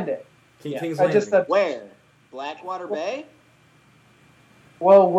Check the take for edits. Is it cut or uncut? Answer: uncut